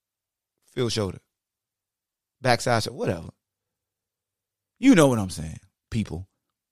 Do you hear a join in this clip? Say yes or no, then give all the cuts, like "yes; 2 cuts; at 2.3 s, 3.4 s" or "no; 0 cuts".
no; 0 cuts